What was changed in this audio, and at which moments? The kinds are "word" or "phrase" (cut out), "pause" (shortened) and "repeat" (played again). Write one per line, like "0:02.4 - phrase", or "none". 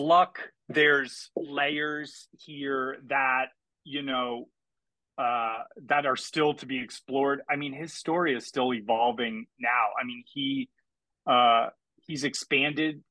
none